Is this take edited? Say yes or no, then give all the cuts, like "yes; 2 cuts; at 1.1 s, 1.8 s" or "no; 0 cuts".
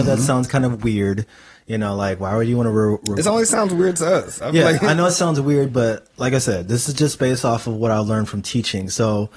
no; 0 cuts